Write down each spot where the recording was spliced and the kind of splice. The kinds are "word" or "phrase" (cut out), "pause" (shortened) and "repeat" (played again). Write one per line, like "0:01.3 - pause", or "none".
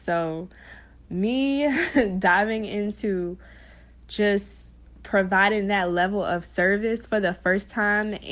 none